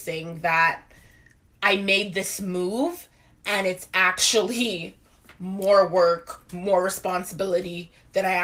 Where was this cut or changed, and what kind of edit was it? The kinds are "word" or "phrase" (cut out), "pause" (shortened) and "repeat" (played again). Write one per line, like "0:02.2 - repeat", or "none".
none